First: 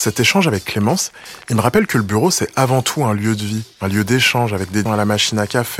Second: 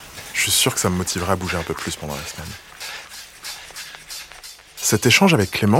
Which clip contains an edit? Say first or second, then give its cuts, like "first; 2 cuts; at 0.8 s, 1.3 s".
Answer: first; 1 cut; at 4.9 s